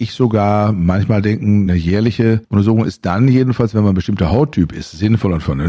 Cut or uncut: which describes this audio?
uncut